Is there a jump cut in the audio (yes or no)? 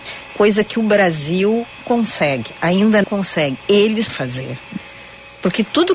yes